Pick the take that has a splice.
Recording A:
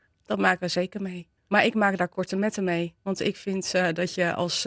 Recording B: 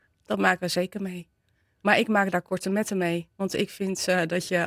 A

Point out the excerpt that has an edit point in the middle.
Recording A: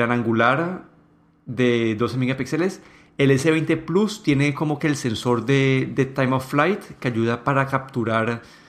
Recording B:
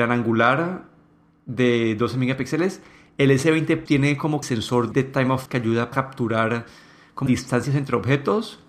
B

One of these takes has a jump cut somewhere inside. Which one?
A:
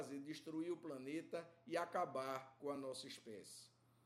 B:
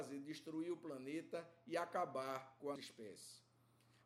B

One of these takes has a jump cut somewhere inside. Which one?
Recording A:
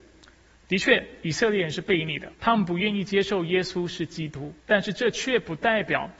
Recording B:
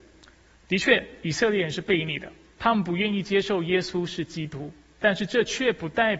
A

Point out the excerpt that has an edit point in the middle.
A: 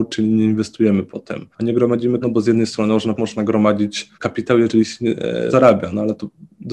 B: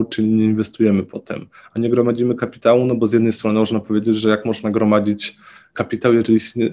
A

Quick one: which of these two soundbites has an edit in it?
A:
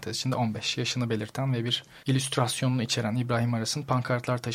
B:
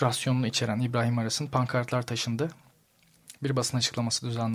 A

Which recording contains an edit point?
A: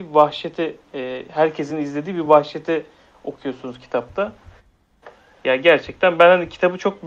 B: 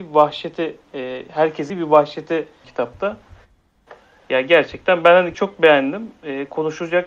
B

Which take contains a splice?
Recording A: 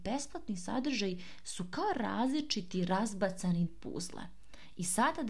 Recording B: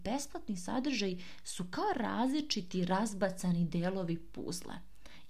A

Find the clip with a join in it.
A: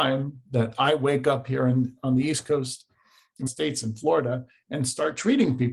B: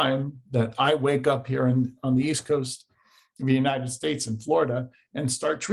A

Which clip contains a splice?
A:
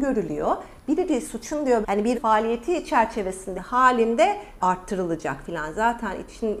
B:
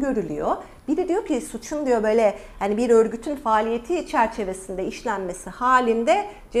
A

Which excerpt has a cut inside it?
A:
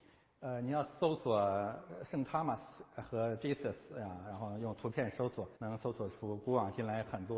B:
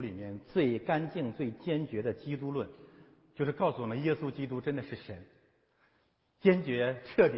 A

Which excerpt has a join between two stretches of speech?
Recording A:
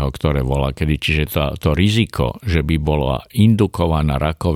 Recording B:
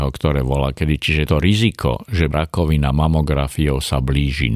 B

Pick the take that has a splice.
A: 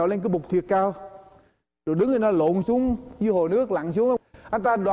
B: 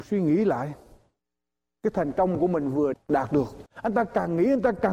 B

